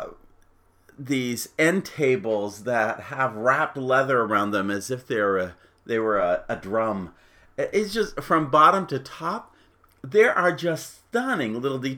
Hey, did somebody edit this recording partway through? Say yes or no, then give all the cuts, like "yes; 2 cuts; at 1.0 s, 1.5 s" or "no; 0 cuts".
no; 0 cuts